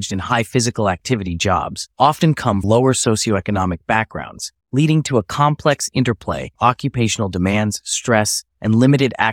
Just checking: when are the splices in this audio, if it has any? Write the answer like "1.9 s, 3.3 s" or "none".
1.9 s, 2.6 s, 4.6 s, 6.6 s